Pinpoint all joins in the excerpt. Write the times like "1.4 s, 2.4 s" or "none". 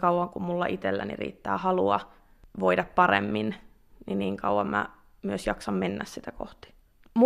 none